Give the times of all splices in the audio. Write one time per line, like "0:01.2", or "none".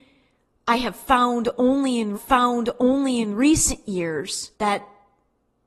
0:02.1
0:04.5